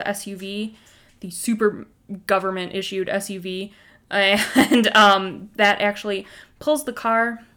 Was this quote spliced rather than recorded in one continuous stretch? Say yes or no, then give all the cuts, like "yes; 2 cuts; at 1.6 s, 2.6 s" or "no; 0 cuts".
no; 0 cuts